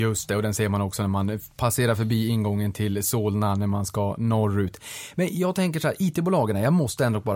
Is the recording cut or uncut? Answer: uncut